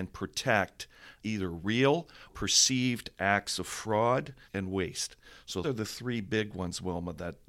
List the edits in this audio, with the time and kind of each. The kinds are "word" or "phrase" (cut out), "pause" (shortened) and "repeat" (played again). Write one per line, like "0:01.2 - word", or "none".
0:01.2 - word
0:02.3 - word
0:04.5 - word
0:05.6 - word